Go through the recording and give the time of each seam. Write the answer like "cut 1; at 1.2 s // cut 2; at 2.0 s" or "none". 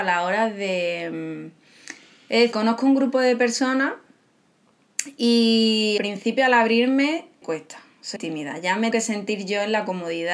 cut 1; at 2.5 s // cut 2; at 6.0 s // cut 3; at 7.4 s // cut 4; at 8.2 s // cut 5; at 8.9 s